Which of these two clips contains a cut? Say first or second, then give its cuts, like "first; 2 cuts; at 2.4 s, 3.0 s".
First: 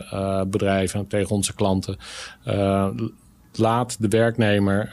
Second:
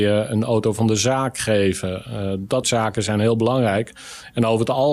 second; 1 cut; at 2.6 s